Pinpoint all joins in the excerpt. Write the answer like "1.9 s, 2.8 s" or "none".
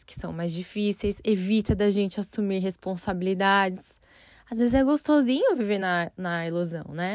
none